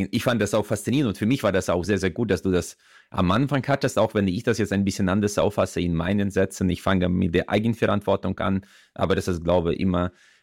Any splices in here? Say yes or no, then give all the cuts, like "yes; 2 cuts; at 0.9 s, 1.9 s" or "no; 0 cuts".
no; 0 cuts